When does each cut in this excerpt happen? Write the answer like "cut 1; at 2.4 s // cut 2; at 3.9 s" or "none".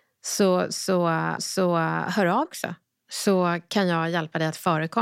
cut 1; at 1.4 s // cut 2; at 2.4 s

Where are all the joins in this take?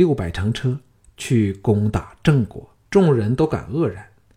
cut 1; at 2.9 s

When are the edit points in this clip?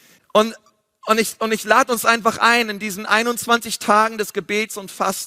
none

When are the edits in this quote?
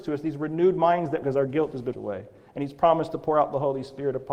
cut 1; at 1.2 s // cut 2; at 1.9 s

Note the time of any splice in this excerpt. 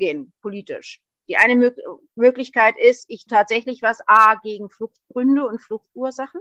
cut 1; at 3.3 s

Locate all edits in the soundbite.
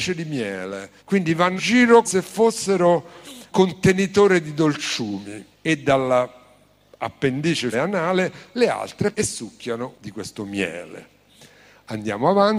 cut 1; at 1.0 s // cut 2; at 1.6 s // cut 3; at 2.0 s // cut 4; at 3.5 s // cut 5; at 5.5 s // cut 6; at 7.7 s // cut 7; at 9.1 s // cut 8; at 9.9 s

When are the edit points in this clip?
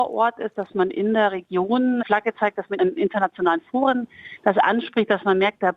cut 1; at 2.0 s

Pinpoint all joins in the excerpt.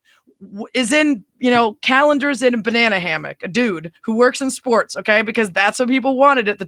cut 1; at 4.0 s

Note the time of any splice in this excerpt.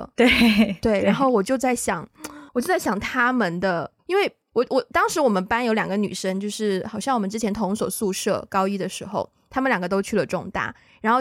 cut 1; at 2.5 s // cut 2; at 4.0 s // cut 3; at 4.4 s

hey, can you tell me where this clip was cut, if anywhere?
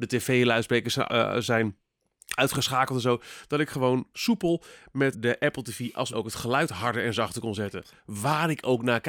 cut 1; at 1.1 s // cut 2; at 5.1 s // cut 3; at 6.1 s

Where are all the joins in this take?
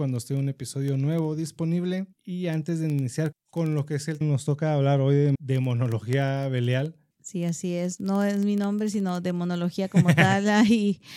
cut 1; at 2.1 s // cut 2; at 3.3 s // cut 3; at 4.2 s // cut 4; at 5.3 s // cut 5; at 7.1 s

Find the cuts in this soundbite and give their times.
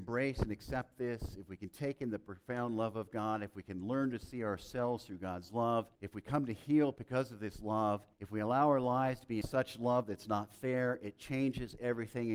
cut 1; at 5.9 s // cut 2; at 8.1 s // cut 3; at 9.4 s

